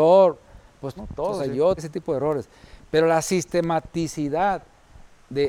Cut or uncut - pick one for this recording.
cut